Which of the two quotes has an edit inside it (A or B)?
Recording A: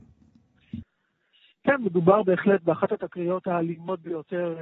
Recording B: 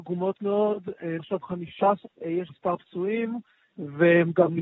B